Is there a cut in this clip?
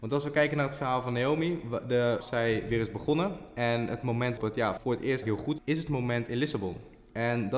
yes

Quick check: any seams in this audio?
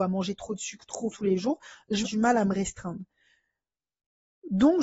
yes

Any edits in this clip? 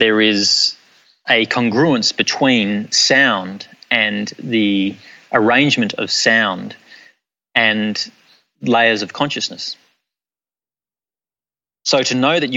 no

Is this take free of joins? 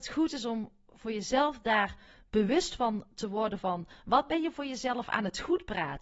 yes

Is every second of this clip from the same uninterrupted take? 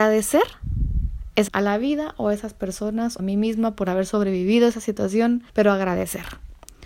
no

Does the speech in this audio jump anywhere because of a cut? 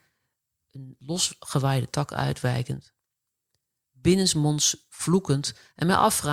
no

